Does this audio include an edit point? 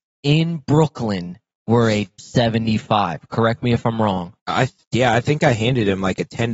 yes; 2 cuts; at 2.2 s, 4.4 s

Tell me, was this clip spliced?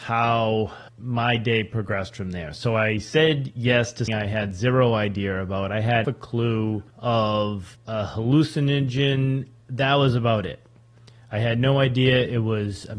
yes; 2 cuts; at 4.1 s, 6.0 s

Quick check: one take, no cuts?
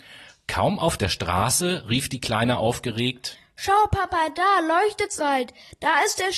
no; 1 cut; at 5.2 s

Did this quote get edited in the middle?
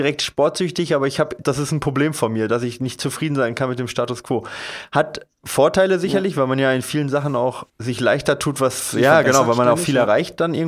yes; 2 cuts; at 1.4 s, 7.7 s

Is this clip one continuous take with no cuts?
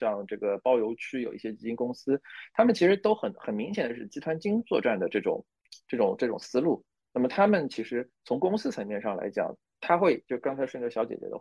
yes; 0 cuts

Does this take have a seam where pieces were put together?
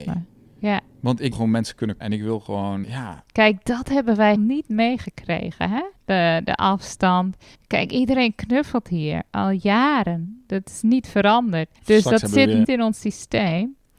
yes; 8 cuts; at 1.3 s, 2.0 s, 2.8 s, 4.4 s, 6.0 s, 7.5 s, 11.8 s, 12.6 s

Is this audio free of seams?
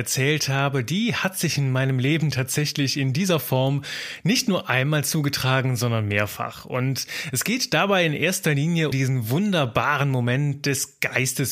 no; 1 cut; at 8.9 s

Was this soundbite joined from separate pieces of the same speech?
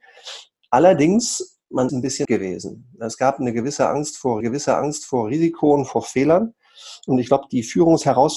yes; 3 cuts; at 1.9 s, 2.2 s, 4.4 s

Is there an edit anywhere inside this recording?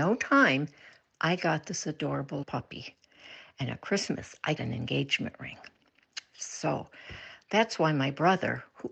yes; 2 cuts; at 2.4 s, 4.6 s

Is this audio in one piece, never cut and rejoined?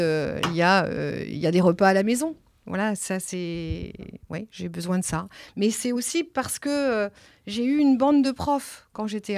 yes; 0 cuts

